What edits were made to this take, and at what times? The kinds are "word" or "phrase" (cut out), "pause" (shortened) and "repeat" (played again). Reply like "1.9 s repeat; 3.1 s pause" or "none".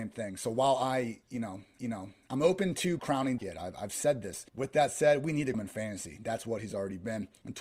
1.8 s repeat; 3.0 s phrase; 3.4 s word; 4.5 s pause; 5.5 s word